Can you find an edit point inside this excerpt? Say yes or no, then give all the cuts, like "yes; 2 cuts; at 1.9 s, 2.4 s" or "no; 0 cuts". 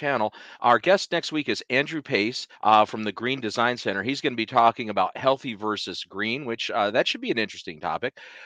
yes; 1 cut; at 2.5 s